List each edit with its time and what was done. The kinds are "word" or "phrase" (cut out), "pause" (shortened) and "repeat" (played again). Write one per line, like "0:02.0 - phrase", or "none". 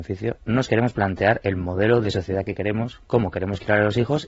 none

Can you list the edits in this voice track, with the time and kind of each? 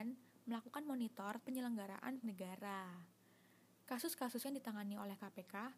0:01.4 - word
0:02.2 - word
0:04.4 - word

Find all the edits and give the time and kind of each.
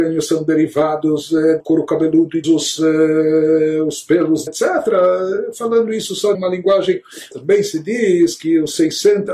0:01.6 - word
0:02.4 - phrase
0:04.5 - phrase
0:06.3 - word
0:07.3 - word

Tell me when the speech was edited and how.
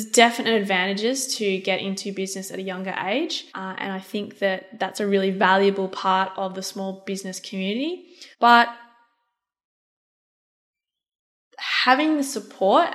0:03.5 - pause
0:08.3 - pause

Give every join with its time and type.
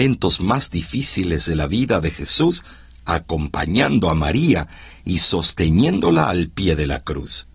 none

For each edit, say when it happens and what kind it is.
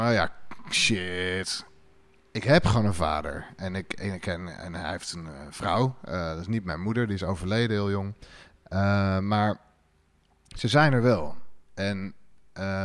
none

